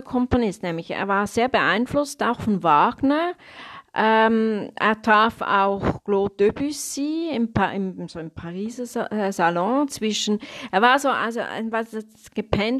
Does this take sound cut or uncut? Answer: uncut